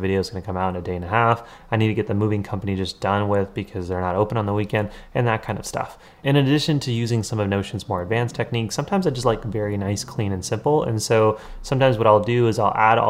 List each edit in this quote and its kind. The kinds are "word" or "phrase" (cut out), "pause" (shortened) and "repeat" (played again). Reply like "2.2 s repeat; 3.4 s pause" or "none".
none